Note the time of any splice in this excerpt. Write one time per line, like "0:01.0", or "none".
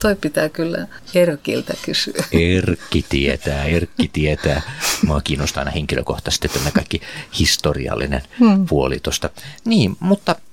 none